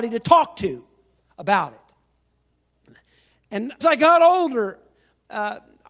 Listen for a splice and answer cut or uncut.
cut